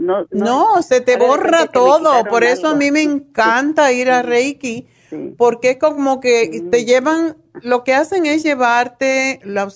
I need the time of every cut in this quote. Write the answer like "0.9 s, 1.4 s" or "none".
none